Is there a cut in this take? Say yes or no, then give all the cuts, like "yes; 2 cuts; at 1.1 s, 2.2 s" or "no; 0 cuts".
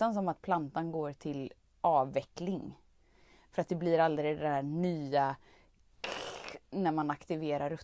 no; 0 cuts